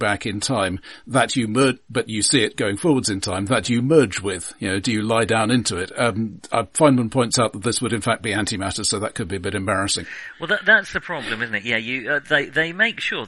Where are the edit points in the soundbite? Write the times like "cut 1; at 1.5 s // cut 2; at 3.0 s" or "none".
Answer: none

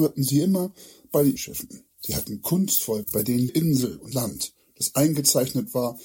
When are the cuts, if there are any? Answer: cut 1; at 1.4 s // cut 2; at 1.9 s // cut 3; at 3.0 s // cut 4; at 3.5 s // cut 5; at 4.1 s

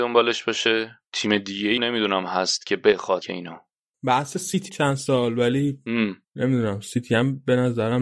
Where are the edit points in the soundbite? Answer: cut 1; at 1.1 s // cut 2; at 1.8 s // cut 3; at 3.2 s // cut 4; at 4.7 s // cut 5; at 6.2 s

